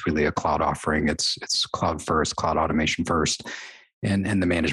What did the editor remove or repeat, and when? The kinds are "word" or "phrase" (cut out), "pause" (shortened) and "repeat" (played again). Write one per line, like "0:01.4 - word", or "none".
none